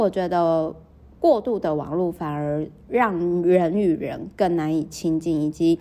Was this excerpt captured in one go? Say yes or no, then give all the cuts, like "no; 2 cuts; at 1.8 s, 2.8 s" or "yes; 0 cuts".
yes; 0 cuts